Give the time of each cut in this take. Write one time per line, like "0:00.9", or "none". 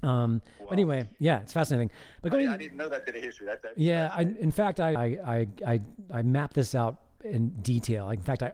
0:04.9